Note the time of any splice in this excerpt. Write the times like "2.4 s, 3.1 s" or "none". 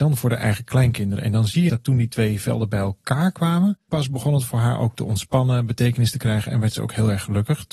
1.7 s, 3.9 s